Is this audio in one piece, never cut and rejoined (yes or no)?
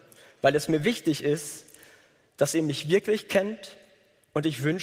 yes